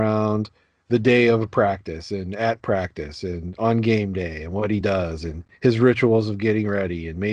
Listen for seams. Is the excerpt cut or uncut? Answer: uncut